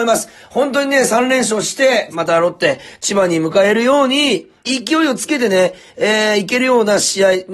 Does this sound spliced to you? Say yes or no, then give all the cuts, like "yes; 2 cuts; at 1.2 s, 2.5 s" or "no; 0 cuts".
yes; 2 cuts; at 2.1 s, 4.6 s